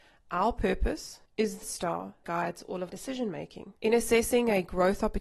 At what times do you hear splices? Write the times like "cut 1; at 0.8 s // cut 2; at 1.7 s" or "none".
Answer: cut 1; at 1.3 s // cut 2; at 1.6 s // cut 3; at 2.2 s // cut 4; at 2.9 s // cut 5; at 3.8 s